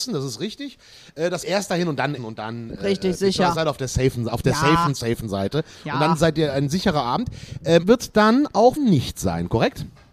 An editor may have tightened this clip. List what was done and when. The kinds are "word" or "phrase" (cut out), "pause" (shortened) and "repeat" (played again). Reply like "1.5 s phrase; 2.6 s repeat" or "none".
1.4 s phrase; 2.2 s word; 7.8 s word; 8.8 s word